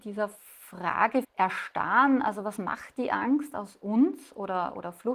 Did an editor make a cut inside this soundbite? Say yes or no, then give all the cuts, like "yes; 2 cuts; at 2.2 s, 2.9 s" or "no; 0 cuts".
yes; 1 cut; at 1.2 s